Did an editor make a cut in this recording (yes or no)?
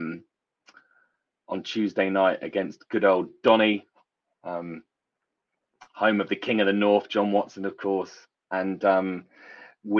no